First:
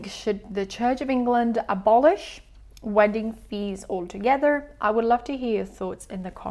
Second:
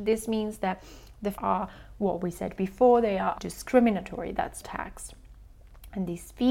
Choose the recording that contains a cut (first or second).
second